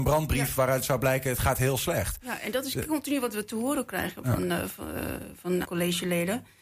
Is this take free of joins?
no; 1 cut; at 5.6 s

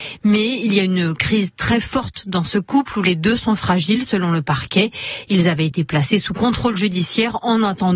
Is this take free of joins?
yes; 0 cuts

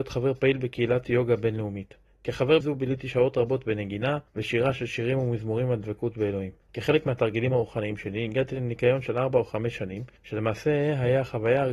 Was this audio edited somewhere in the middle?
yes; 4 cuts; at 2.6 s, 4.3 s, 6.6 s, 10.2 s

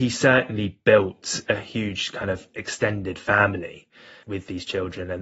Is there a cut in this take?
no; 0 cuts

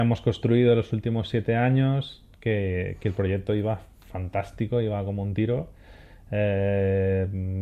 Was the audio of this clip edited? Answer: no; 0 cuts

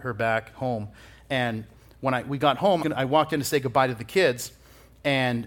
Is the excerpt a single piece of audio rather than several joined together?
no; 1 cut; at 2.8 s

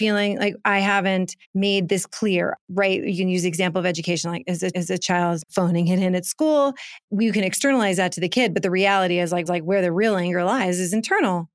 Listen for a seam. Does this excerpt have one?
yes; 4 cuts; at 1.4 s, 4.7 s, 5.4 s, 9.5 s

